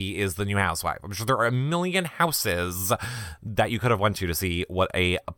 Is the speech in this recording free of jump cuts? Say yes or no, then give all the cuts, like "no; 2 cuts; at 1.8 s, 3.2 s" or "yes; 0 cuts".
yes; 0 cuts